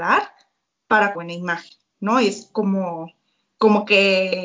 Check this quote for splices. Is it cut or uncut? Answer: cut